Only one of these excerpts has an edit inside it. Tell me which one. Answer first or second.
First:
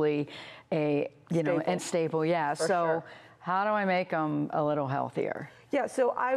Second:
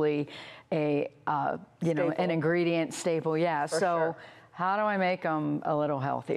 first